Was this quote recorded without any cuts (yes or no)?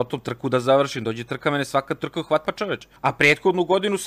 no